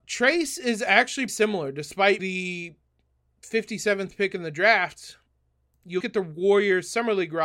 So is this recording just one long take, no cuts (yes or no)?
no